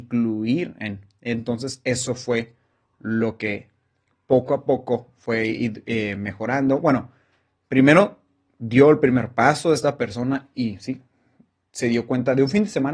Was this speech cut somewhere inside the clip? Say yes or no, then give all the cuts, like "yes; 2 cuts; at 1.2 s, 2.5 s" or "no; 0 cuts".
no; 0 cuts